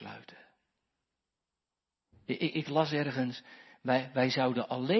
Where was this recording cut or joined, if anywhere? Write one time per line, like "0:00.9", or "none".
none